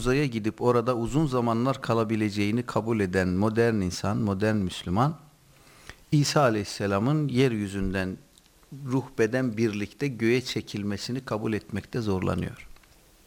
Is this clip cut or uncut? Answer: uncut